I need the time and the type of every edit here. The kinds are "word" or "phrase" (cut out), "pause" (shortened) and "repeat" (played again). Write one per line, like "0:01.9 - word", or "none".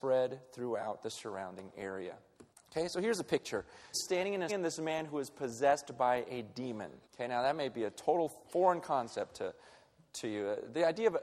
0:02.5 - pause
0:03.9 - word
0:04.5 - phrase
0:07.0 - pause